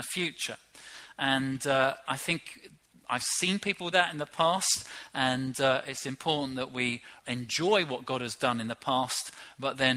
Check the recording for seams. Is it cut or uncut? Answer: cut